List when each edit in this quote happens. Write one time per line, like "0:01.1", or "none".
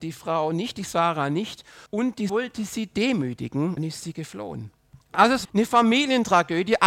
0:01.9
0:02.3
0:03.8
0:05.0
0:05.4